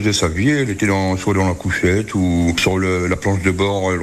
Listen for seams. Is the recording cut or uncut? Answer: uncut